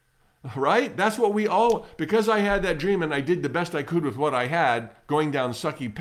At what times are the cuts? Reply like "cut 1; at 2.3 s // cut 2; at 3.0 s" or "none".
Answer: none